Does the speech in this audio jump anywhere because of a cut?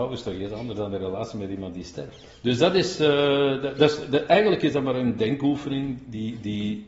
no; 0 cuts

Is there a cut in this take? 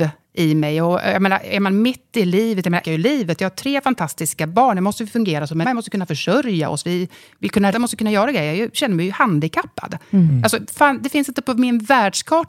yes; 3 cuts; at 2.8 s, 5.6 s, 7.7 s

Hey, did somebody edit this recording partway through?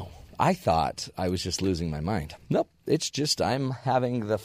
no; 0 cuts

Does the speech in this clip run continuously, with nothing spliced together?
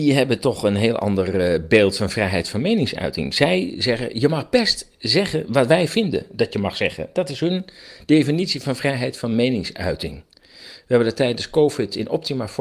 yes; 0 cuts

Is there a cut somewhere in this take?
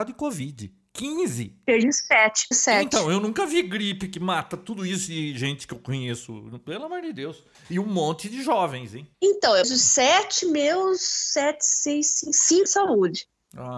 yes; 4 cuts; at 2.5 s, 9.1 s, 9.6 s, 12.7 s

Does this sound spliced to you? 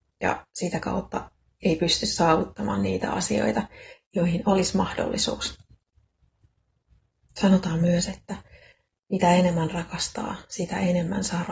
no; 0 cuts

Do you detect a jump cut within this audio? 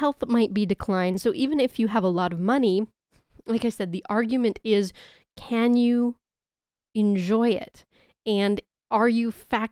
no; 0 cuts

